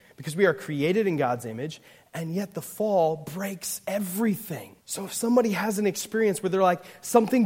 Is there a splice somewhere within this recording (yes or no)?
yes